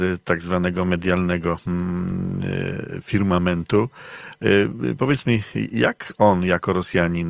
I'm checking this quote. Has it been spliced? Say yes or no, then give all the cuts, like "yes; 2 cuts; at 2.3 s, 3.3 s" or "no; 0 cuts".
no; 0 cuts